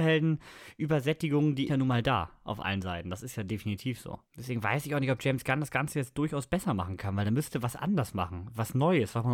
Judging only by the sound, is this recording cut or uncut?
cut